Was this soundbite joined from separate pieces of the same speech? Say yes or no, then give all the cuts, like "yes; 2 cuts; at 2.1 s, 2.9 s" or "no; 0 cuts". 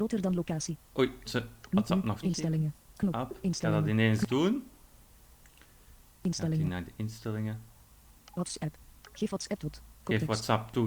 yes; 3 cuts; at 1.3 s, 2.2 s, 9.6 s